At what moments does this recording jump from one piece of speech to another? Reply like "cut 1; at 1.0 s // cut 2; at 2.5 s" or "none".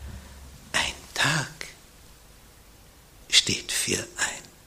none